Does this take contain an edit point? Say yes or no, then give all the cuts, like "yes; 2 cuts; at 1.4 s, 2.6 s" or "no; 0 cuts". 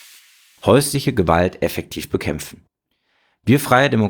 no; 0 cuts